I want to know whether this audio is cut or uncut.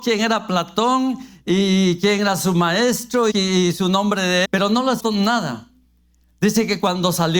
cut